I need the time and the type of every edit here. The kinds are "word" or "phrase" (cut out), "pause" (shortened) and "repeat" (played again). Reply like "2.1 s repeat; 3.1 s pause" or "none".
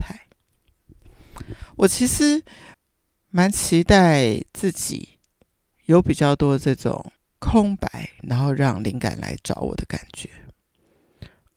7.2 s pause

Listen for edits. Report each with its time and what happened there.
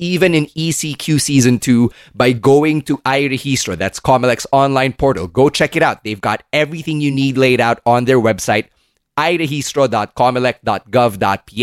none

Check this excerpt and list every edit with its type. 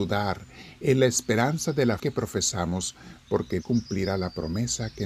2.0 s word; 3.6 s word

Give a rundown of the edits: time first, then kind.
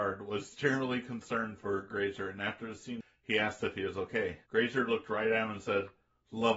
4.4 s pause

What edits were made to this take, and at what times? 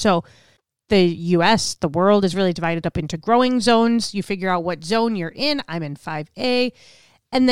none

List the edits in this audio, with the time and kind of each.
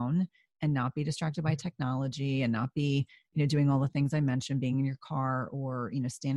none

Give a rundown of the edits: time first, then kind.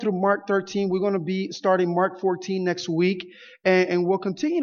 none

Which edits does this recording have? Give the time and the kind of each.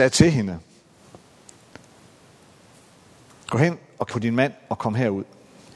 4.1 s word

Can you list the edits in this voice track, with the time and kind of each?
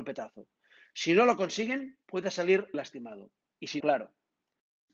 2.0 s pause; 2.7 s word; 3.8 s word

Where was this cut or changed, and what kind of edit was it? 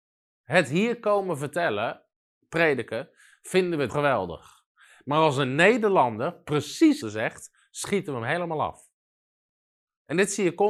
3.9 s word; 7.0 s word

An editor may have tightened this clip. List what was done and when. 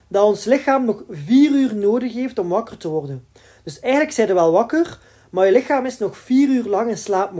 none

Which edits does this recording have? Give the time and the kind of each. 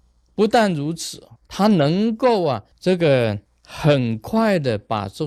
1.4 s pause; 2.7 s pause; 3.5 s pause

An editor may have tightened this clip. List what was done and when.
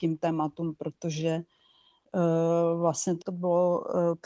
3.2 s phrase

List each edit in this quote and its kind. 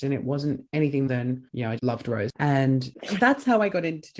1.1 s word; 1.8 s word; 3.2 s word

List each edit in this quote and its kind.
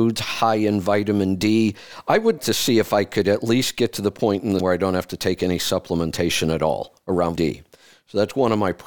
2.4 s word; 4.6 s word; 7.4 s word

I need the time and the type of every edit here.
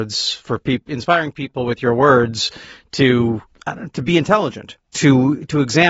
3.5 s pause; 4.8 s pause

